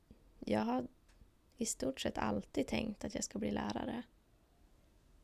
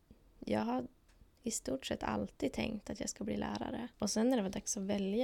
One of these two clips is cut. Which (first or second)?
second